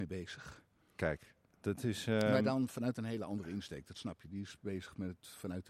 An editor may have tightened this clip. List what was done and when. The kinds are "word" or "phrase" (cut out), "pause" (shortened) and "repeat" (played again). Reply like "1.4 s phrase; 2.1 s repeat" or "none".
1.5 s word

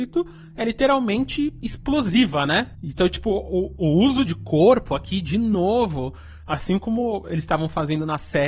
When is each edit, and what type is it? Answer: 4.2 s phrase

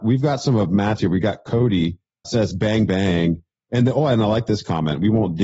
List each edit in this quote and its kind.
1.0 s word; 2.2 s word; 2.9 s word

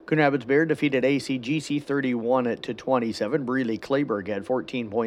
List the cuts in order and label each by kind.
none

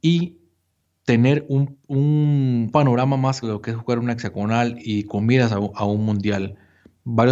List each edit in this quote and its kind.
2.7 s word; 3.4 s word; 4.8 s word

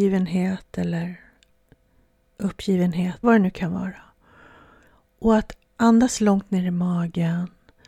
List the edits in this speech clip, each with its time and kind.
3.2 s word; 5.8 s word

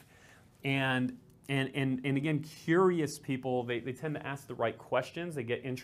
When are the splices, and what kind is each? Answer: none

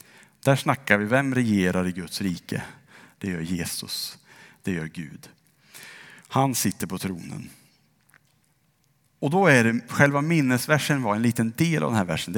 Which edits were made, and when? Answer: none

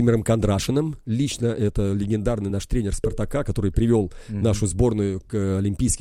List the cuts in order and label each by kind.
none

